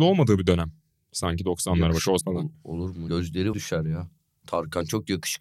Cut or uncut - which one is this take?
cut